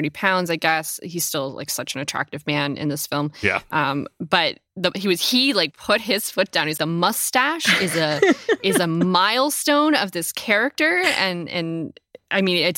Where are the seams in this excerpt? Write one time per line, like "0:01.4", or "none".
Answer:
0:06.8